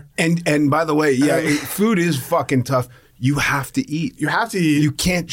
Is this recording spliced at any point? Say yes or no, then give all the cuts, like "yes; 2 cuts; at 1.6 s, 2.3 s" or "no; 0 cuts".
no; 0 cuts